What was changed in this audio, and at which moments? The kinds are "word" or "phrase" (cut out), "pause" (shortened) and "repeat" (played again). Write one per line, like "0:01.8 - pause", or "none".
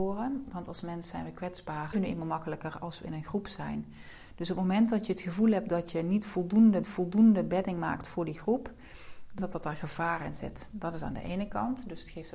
0:01.9 - phrase
0:06.8 - repeat
0:09.4 - word

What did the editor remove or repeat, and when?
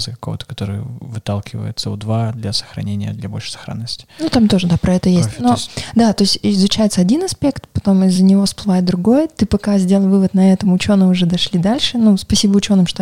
none

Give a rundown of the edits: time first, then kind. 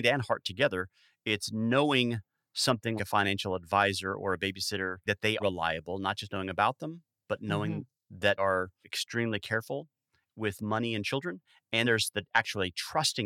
0:03.0 - word
0:05.1 - word
0:05.4 - word
0:08.4 - word
0:08.8 - word
0:11.8 - word

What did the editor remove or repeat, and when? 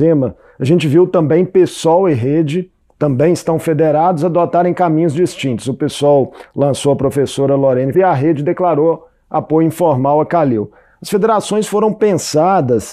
0:02.8 - word
0:07.9 - word

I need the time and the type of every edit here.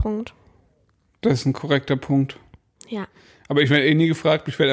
none

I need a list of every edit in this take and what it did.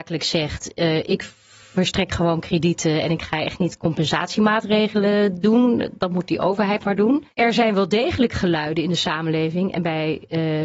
0:07.3 - pause

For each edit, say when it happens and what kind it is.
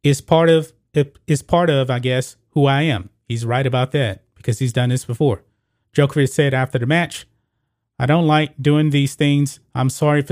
none

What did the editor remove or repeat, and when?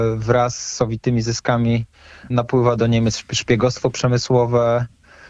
0:02.3 - word

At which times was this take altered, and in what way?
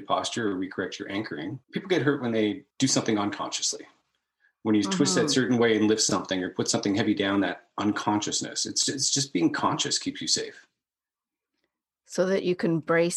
0:01.6 - pause

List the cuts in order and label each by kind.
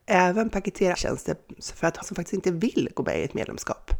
0:00.9 - word
0:02.0 - phrase

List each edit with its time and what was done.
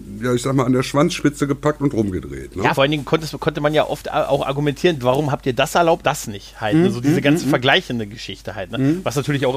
0:02.7 - phrase
0:06.0 - word

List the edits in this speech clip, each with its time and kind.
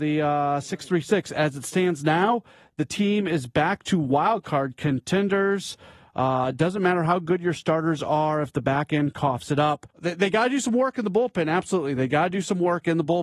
0:09.9 - pause

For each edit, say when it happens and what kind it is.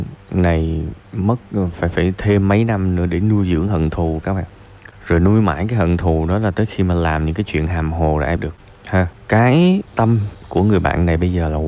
0:01.7 - word
0:08.4 - word
0:09.9 - word

